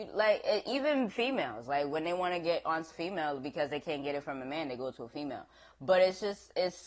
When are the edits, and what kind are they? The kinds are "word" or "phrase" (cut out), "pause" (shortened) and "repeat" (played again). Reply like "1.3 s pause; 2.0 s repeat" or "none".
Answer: 2.9 s word